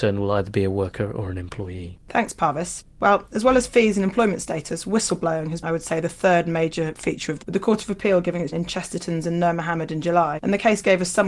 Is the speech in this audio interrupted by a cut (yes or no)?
yes